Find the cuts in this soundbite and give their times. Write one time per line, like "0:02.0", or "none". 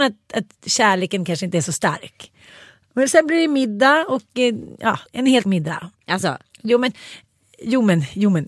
0:05.1
0:05.4